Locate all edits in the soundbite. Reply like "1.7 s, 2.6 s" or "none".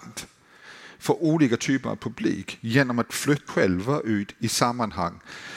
3.5 s